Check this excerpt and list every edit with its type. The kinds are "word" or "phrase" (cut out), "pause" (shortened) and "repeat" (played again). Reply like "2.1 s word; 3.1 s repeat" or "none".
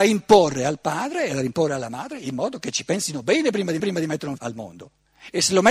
3.8 s repeat; 4.4 s word